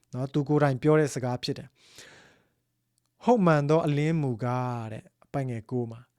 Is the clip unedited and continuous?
yes; 0 cuts

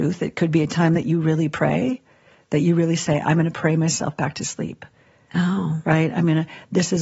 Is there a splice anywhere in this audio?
no; 0 cuts

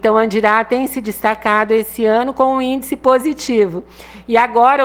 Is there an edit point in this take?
no; 0 cuts

